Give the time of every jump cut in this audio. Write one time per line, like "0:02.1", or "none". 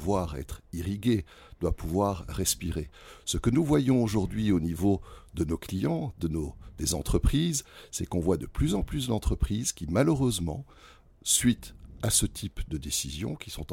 none